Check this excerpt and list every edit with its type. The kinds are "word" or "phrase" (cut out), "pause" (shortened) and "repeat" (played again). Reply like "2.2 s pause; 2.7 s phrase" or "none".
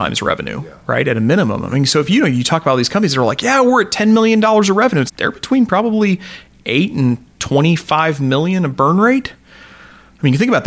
5.1 s word